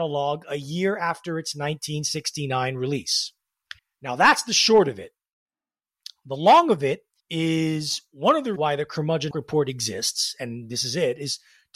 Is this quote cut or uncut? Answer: cut